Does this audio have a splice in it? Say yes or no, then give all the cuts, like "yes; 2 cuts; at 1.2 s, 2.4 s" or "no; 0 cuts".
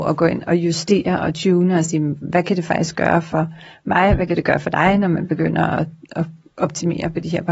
no; 0 cuts